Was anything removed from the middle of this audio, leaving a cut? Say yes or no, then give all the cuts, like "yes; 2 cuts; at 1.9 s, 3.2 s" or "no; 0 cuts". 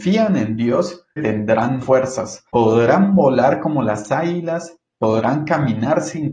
yes; 3 cuts; at 1.2 s, 1.8 s, 2.5 s